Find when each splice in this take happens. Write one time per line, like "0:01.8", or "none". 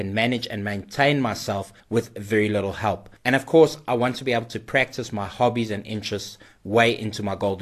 0:01.8
0:03.2